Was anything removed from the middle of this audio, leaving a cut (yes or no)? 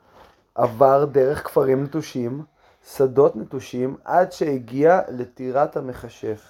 no